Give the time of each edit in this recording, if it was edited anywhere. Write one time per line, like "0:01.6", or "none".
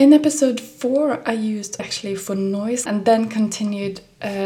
0:01.8
0:02.9